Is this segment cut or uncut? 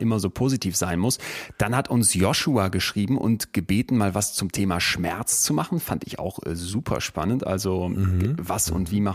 uncut